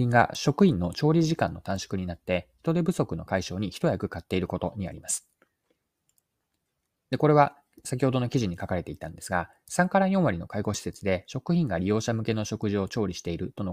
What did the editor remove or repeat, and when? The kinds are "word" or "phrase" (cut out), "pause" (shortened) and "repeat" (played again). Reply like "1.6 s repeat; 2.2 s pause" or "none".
none